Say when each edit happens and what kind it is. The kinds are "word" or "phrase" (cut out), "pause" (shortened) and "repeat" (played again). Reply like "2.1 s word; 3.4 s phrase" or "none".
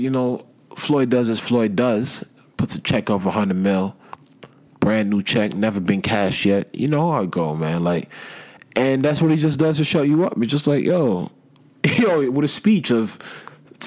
none

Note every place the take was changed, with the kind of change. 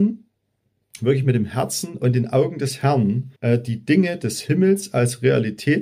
3.4 s pause

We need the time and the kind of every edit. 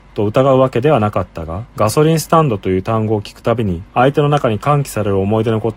1.7 s pause; 3.9 s pause

